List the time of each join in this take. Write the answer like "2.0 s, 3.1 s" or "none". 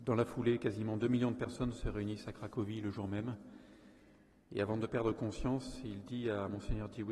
none